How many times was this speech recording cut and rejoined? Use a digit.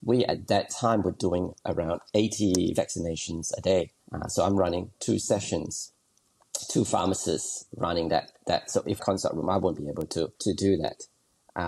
3